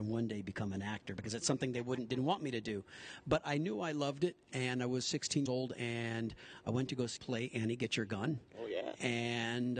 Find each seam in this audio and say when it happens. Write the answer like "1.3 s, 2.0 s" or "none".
5.5 s, 7.2 s